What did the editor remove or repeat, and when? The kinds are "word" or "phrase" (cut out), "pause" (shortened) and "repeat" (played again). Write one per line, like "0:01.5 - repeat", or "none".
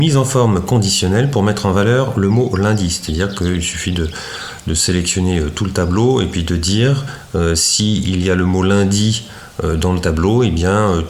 none